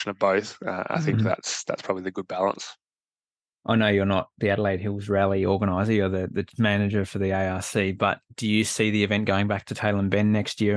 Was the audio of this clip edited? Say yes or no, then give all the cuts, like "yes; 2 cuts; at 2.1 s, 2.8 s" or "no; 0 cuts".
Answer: no; 0 cuts